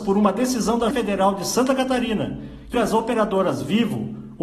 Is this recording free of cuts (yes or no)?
no